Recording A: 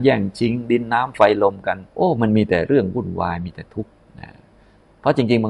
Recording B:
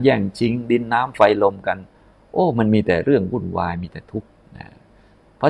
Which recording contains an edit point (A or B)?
A